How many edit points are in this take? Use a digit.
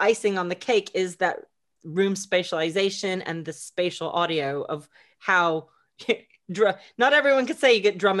0